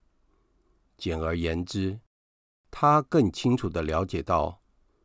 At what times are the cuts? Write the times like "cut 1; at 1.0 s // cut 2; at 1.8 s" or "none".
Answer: none